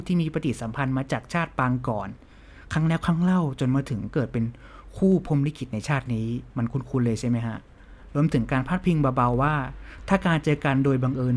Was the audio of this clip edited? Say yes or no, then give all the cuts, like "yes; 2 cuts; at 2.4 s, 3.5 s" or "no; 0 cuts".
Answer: yes; 1 cut; at 6.5 s